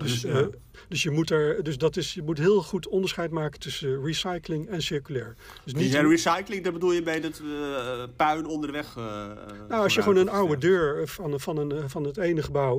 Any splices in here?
no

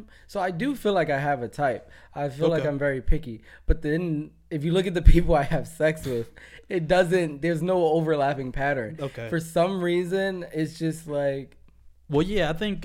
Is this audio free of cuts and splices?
no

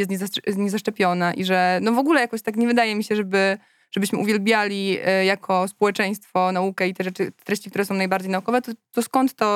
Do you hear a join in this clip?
no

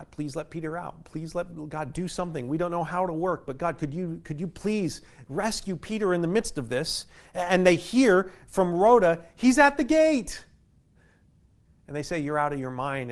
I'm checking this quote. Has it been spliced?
no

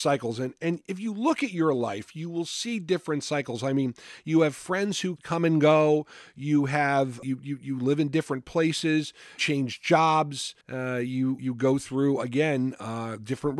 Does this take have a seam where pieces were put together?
yes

